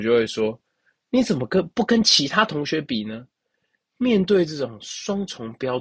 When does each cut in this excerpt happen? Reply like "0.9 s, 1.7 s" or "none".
none